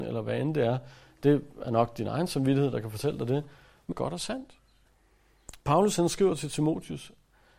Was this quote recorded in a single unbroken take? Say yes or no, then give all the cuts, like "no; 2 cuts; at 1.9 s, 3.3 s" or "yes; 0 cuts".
no; 2 cuts; at 3.9 s, 5.6 s